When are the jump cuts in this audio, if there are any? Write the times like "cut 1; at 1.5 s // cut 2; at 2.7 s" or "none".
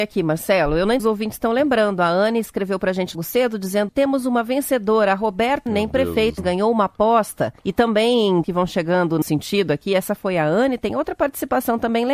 cut 1; at 1.0 s // cut 2; at 3.1 s // cut 3; at 3.9 s // cut 4; at 5.7 s // cut 5; at 6.4 s // cut 6; at 7.6 s // cut 7; at 8.4 s // cut 8; at 9.2 s

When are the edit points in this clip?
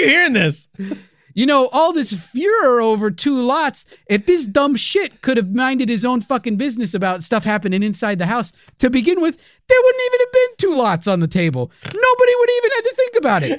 none

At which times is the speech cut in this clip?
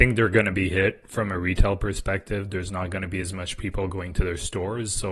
none

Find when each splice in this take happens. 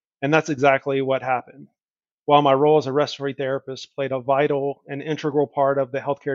none

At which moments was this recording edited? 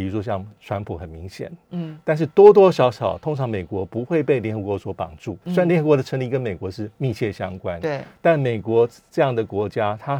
cut 1; at 5.4 s // cut 2; at 6.9 s

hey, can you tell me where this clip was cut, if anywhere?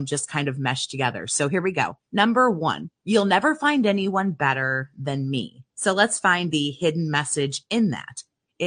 cut 1; at 2.0 s // cut 2; at 3.0 s // cut 3; at 5.7 s

